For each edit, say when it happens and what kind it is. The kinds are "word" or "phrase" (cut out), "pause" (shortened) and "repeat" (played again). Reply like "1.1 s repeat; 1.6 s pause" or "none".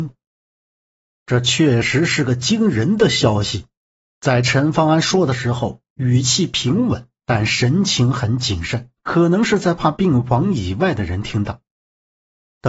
9.0 s pause